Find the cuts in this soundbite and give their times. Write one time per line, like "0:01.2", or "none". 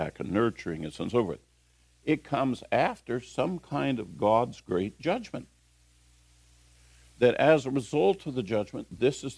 none